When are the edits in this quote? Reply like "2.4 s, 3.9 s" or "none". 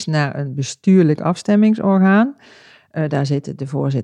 none